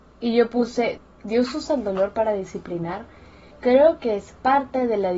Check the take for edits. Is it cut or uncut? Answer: uncut